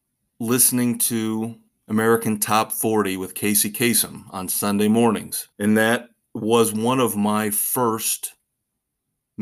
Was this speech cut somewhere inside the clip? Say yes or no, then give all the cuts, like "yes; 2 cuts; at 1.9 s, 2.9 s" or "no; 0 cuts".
yes; 2 cuts; at 1.7 s, 5.5 s